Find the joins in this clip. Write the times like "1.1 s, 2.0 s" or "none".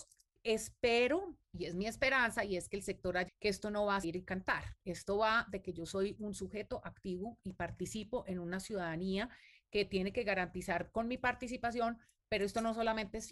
1.4 s, 3.3 s, 4.0 s